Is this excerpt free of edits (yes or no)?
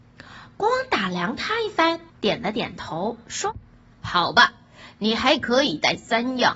no